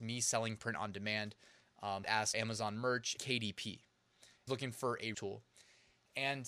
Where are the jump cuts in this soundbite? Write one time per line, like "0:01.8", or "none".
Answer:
0:02.0
0:02.3
0:03.2
0:04.5
0:05.1